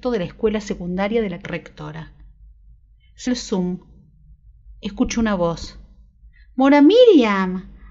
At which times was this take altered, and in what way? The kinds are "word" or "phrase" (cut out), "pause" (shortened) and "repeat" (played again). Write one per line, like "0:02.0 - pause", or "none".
0:01.4 - word
0:03.3 - word